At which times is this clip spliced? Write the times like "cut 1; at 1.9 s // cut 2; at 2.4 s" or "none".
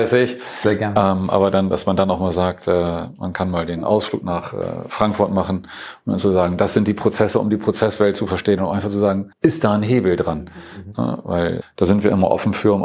cut 1; at 9.3 s // cut 2; at 11.6 s